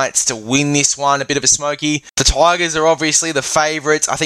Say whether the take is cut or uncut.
uncut